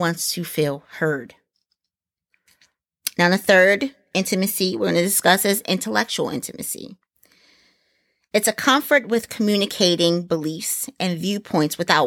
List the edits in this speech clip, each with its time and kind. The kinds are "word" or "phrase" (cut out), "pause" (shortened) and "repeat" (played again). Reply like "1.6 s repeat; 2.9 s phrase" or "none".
none